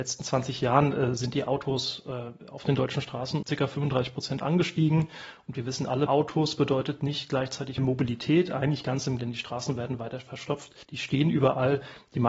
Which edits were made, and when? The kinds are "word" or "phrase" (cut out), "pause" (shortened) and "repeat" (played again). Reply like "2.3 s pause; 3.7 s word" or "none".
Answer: 3.4 s word; 6.1 s word; 7.8 s word; 9.2 s word; 10.8 s pause